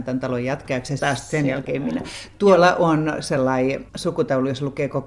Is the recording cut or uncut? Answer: cut